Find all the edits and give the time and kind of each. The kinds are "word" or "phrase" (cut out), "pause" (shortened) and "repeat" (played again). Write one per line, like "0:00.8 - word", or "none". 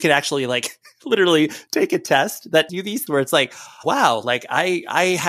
0:02.7 - word
0:03.1 - word
0:03.8 - word